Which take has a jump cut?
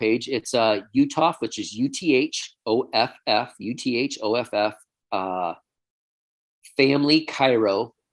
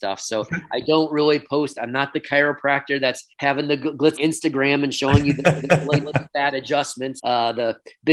second; 4 cuts; at 3.3 s, 4.2 s, 5.6 s, 7.2 s

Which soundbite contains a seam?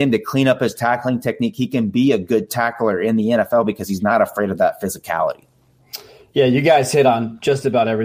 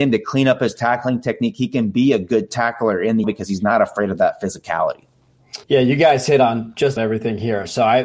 second; 3 cuts; at 3.2 s, 5.6 s, 7.0 s

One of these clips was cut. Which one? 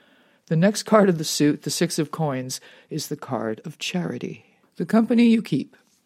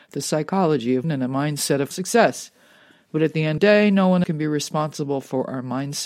second; 4 cuts; at 1.0 s, 1.9 s, 3.6 s, 4.2 s

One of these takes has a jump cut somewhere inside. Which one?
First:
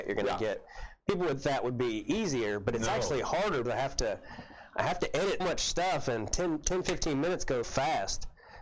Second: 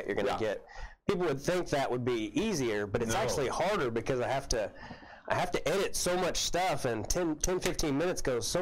first; 4 cuts; at 1.4 s, 3.6 s, 5.4 s, 7.6 s

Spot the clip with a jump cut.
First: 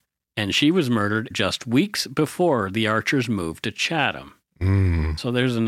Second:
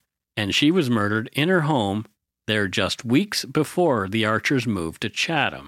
first; 1 cut; at 1.3 s

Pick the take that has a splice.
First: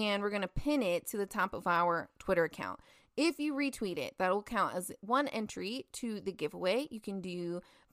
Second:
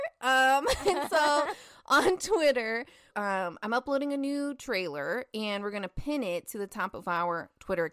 second; 1 cut; at 3.1 s

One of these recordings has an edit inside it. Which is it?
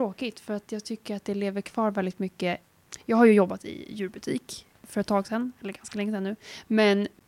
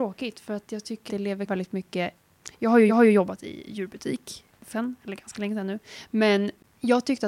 second; 4 cuts; at 1.1 s, 1.5 s, 2.9 s, 4.7 s

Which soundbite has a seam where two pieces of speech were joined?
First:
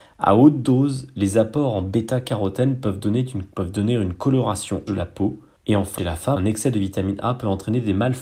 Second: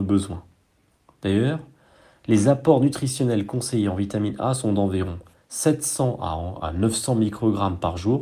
first; 5 cuts; at 3.5 s, 4.9 s, 5.6 s, 6.0 s, 6.4 s

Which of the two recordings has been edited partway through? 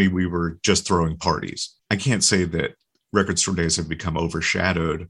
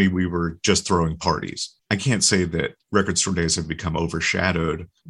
second; 1 cut; at 2.8 s

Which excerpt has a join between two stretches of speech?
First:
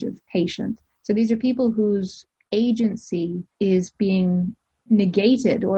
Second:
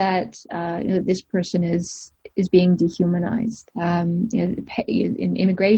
first; 1 cut; at 3.5 s

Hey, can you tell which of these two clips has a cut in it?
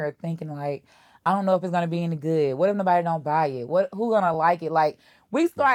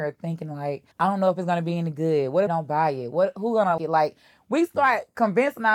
second; 3 cuts; at 0.9 s, 2.5 s, 3.8 s

